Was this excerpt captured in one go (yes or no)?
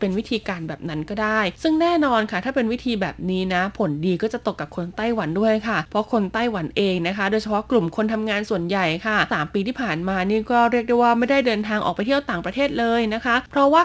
no